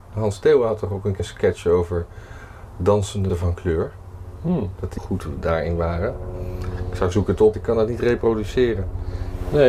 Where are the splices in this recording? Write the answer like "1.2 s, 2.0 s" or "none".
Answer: 1.2 s, 3.3 s, 5.0 s, 7.1 s, 7.5 s